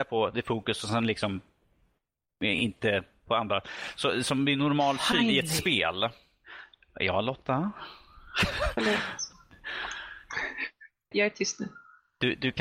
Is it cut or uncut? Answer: cut